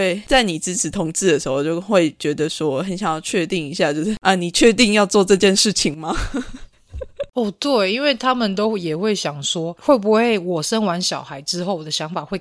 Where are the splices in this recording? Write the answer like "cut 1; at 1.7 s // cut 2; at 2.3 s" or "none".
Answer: none